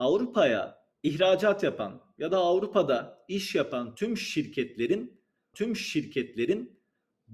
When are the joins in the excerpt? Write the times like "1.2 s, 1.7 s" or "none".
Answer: 0.9 s, 5.5 s